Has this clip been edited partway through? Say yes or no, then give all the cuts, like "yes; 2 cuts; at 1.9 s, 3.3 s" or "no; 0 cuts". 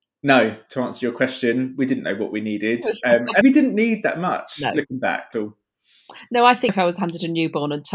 yes; 3 cuts; at 3.4 s, 5.3 s, 6.7 s